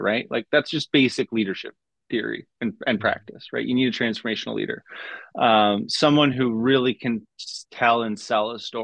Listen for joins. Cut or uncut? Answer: uncut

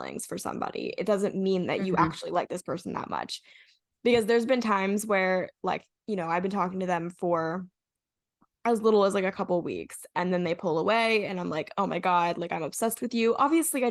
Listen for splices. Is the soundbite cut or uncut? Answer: uncut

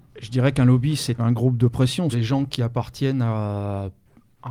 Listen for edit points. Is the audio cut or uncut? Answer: cut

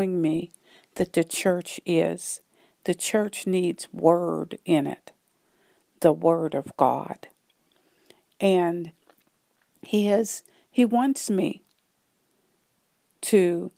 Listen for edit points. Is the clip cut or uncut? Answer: uncut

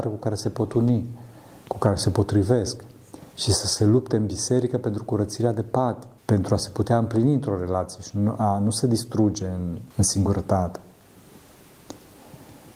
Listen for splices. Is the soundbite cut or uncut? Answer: cut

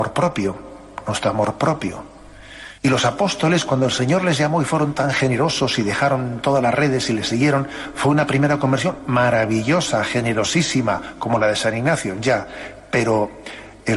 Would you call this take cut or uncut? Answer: cut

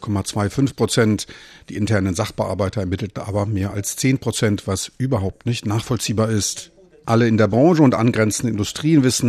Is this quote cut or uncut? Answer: uncut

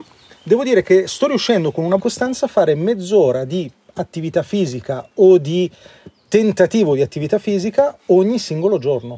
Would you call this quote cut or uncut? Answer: cut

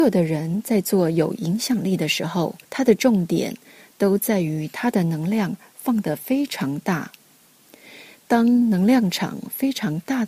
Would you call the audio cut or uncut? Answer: cut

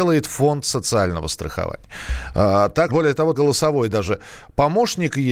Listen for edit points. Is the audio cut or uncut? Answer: cut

